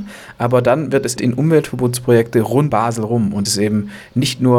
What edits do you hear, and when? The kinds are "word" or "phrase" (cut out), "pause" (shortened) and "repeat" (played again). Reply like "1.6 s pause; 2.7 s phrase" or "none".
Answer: 1.2 s word; 2.7 s word; 3.5 s word